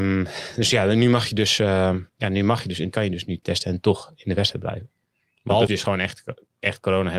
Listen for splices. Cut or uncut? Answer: cut